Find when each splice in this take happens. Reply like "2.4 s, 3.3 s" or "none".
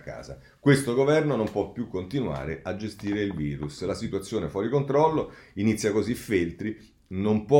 none